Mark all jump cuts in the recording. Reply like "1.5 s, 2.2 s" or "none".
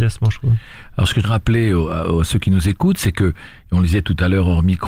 1.2 s